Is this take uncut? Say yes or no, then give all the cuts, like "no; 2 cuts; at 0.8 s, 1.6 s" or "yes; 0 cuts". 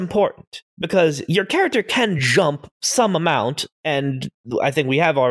yes; 0 cuts